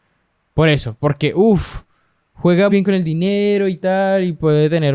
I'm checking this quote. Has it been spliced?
yes; 1 cut; at 2.7 s

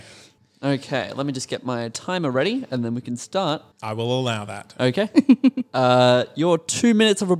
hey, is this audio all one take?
no; 1 cut; at 3.7 s

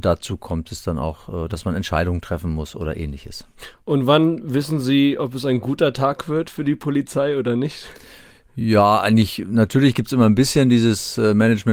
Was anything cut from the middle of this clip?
no; 0 cuts

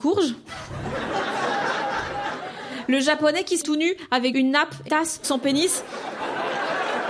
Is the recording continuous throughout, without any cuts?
no; 4 cuts; at 3.6 s, 4.3 s, 4.9 s, 5.2 s

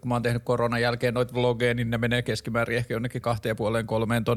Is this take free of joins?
no; 1 cut; at 3.2 s

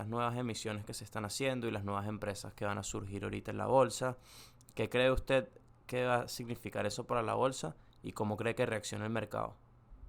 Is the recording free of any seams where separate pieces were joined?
yes; 0 cuts

